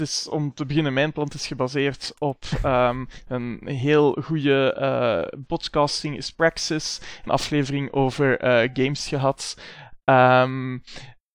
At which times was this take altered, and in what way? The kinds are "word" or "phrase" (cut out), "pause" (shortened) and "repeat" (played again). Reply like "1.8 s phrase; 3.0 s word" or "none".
5.5 s phrase; 7.3 s phrase